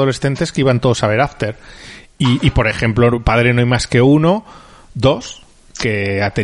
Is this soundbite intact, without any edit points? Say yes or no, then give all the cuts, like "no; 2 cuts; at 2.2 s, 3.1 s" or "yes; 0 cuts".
yes; 0 cuts